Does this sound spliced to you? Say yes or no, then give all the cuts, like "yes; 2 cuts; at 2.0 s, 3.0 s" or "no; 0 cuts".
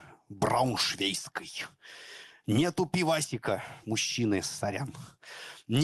no; 0 cuts